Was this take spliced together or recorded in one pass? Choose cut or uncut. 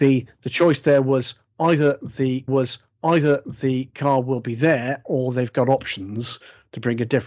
cut